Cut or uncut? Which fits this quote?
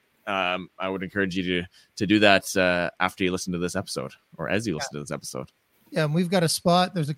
uncut